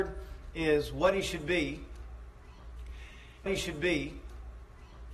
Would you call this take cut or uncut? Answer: cut